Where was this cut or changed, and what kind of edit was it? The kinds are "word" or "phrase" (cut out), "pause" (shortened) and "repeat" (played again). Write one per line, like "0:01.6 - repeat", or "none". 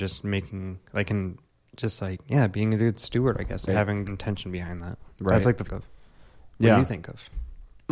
0:01.5 - pause
0:03.7 - word
0:04.0 - phrase
0:05.6 - phrase